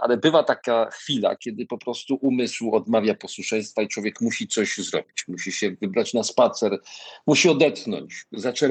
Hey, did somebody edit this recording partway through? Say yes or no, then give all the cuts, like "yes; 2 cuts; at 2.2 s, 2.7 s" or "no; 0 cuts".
no; 0 cuts